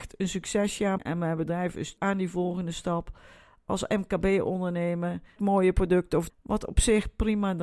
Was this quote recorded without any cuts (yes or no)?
no